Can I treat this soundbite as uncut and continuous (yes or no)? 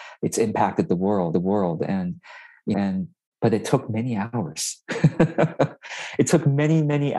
no